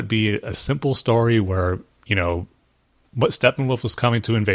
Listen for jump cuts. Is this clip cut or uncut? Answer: uncut